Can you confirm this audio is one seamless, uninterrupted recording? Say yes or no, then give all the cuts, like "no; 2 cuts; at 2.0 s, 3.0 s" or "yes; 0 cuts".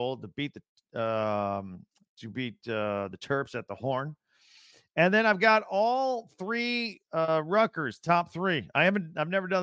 yes; 0 cuts